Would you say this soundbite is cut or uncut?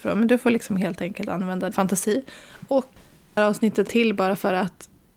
cut